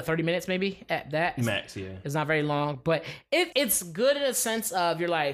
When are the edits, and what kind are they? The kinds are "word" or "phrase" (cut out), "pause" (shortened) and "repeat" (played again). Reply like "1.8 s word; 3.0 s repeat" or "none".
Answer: 3.5 s word